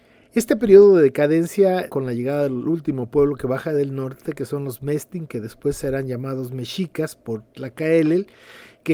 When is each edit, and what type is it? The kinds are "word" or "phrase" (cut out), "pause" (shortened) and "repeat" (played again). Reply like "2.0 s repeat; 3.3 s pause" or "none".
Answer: 1.9 s phrase